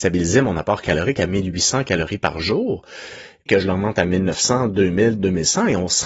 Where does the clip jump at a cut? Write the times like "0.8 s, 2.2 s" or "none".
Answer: 3.5 s